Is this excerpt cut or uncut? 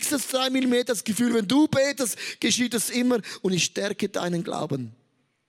uncut